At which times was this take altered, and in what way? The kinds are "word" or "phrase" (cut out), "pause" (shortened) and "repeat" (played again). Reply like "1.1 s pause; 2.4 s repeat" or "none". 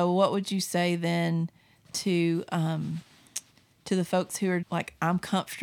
4.6 s word